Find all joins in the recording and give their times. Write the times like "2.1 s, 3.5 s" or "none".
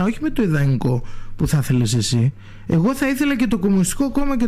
none